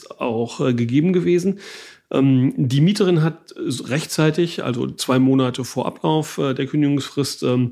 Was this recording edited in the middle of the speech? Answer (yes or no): no